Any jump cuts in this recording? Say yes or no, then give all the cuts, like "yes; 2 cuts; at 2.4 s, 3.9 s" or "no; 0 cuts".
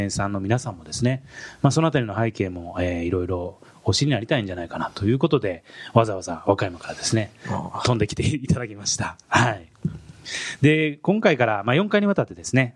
no; 0 cuts